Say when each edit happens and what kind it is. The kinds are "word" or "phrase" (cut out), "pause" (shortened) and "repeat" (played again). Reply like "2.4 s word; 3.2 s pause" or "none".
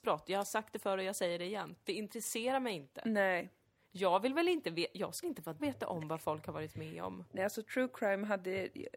5.2 s word; 5.6 s phrase